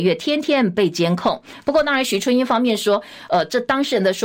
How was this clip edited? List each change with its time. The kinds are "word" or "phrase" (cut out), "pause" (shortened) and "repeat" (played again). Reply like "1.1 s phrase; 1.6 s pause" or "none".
none